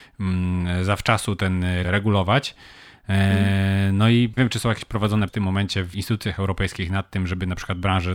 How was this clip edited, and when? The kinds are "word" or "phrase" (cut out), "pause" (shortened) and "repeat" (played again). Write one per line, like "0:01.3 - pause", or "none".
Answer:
0:01.8 - word
0:04.4 - word
0:05.3 - word
0:05.9 - word